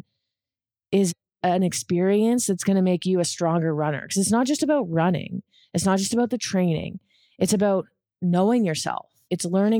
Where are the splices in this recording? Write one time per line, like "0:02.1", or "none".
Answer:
none